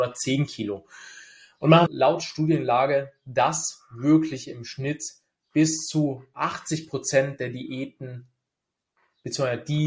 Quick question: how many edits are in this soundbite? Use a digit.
1